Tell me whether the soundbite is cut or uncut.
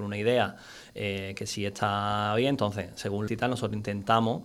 cut